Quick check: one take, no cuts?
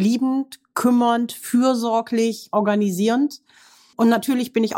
yes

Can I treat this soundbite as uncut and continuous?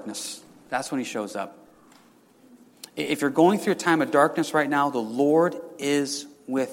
yes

